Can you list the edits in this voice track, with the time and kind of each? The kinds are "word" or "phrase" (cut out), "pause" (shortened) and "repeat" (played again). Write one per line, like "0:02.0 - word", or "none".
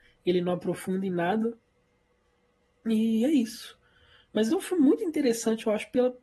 0:04.5 - word